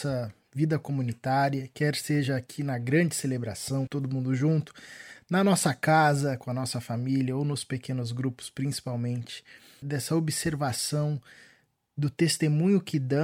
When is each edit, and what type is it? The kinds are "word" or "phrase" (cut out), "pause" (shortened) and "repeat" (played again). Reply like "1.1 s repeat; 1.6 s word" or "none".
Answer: 3.9 s word